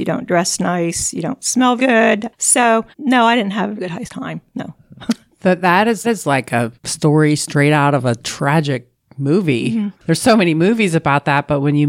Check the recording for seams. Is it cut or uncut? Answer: cut